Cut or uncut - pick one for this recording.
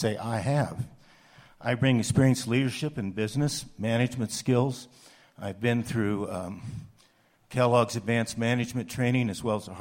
uncut